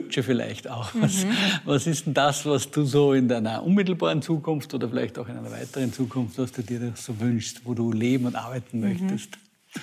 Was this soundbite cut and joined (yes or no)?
no